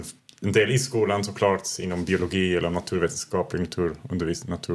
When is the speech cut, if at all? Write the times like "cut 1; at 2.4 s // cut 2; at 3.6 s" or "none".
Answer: none